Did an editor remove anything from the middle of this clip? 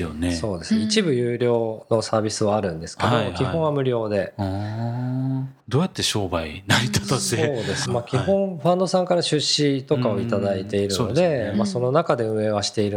yes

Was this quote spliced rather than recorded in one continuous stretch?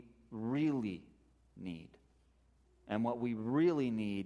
no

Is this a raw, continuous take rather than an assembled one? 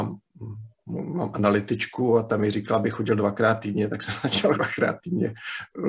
no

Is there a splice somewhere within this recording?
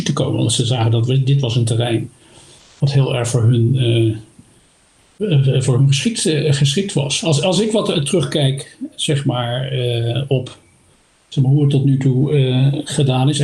no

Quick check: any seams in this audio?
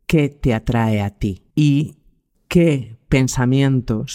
yes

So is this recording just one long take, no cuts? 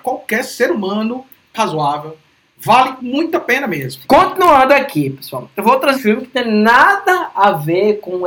no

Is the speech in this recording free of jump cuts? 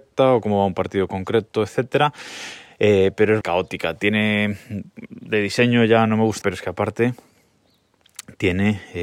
no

